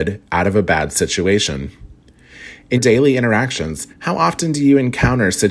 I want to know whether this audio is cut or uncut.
cut